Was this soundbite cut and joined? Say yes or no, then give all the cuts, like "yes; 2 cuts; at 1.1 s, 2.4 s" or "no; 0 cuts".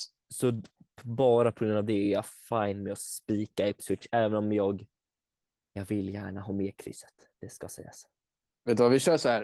no; 0 cuts